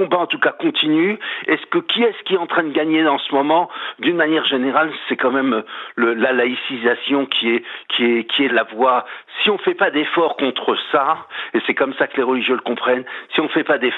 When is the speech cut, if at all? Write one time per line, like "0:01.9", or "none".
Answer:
0:08.5